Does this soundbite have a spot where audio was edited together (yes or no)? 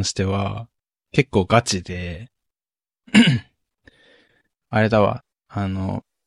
no